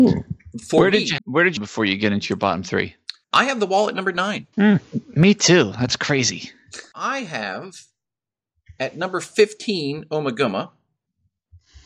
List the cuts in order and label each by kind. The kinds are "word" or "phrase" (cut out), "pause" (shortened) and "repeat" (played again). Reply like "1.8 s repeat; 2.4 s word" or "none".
1.2 s word; 1.6 s phrase; 3.2 s pause; 4.5 s pause